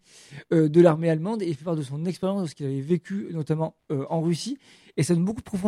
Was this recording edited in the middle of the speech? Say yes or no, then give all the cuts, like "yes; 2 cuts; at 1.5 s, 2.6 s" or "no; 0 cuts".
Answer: no; 0 cuts